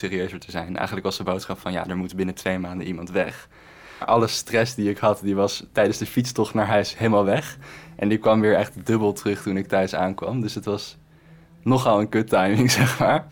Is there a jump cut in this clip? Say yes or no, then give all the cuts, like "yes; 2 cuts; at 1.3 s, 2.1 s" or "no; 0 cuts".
no; 0 cuts